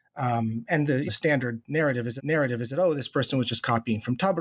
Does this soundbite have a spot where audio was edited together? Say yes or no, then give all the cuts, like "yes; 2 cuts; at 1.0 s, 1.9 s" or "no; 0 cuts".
yes; 2 cuts; at 1.1 s, 2.2 s